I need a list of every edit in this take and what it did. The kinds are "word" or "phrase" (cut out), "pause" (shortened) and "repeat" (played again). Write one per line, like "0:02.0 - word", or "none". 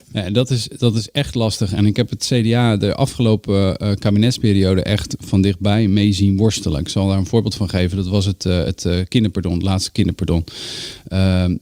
none